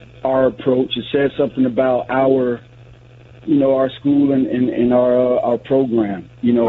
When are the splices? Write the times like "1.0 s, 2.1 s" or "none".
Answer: none

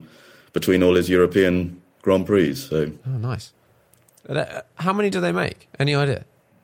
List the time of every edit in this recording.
3.0 s

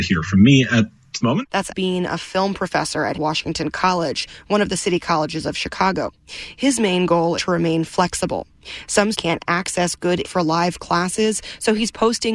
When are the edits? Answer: 1.2 s, 1.7 s, 3.1 s, 7.4 s, 9.1 s, 10.2 s

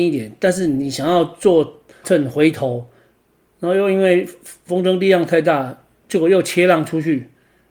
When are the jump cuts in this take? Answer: 2.0 s

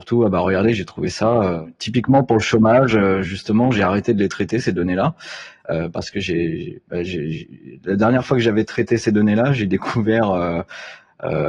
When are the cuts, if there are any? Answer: none

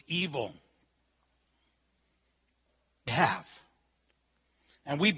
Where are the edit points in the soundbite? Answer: 3.1 s

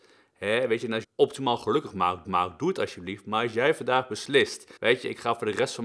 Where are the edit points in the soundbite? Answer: 1.0 s, 2.2 s, 4.8 s

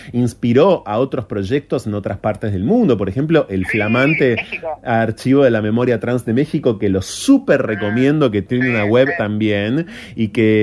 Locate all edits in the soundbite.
9.2 s

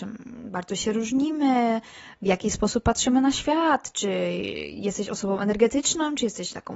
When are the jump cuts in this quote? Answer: none

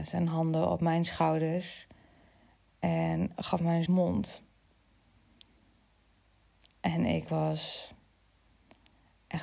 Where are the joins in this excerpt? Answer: 3.3 s, 3.9 s

